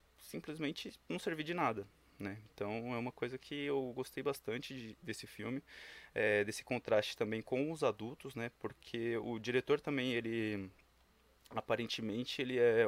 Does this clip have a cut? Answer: no; 0 cuts

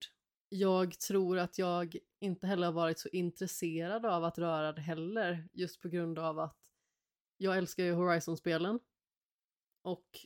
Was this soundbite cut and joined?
no; 0 cuts

